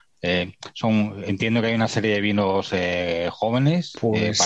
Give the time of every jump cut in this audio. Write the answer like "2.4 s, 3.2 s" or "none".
none